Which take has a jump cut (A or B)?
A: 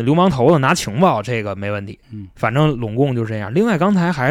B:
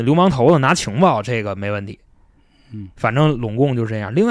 A